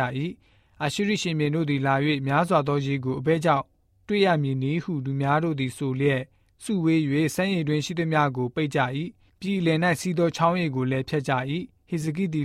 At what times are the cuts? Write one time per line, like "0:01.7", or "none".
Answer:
none